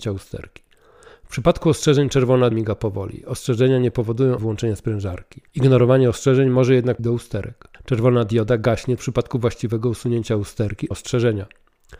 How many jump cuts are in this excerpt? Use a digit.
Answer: 7